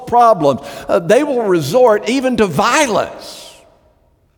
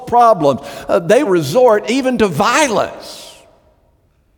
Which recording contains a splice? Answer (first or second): second